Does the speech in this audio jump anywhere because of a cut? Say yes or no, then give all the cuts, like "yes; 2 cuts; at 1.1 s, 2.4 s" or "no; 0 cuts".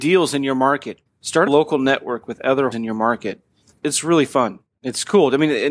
yes; 4 cuts; at 1.1 s, 1.5 s, 2.7 s, 3.8 s